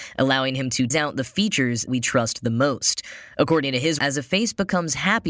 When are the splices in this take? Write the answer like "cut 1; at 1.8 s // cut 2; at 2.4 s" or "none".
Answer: cut 1; at 0.9 s // cut 2; at 1.9 s // cut 3; at 4.0 s